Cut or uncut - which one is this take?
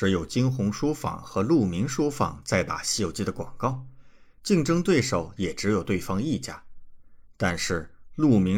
uncut